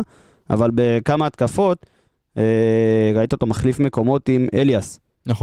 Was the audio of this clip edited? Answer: no; 0 cuts

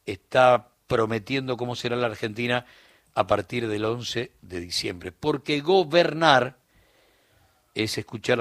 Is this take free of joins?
yes; 0 cuts

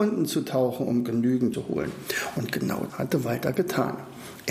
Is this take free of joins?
no; 2 cuts; at 1.5 s, 2.9 s

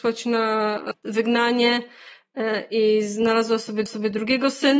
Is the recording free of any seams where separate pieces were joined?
no; 1 cut; at 3.9 s

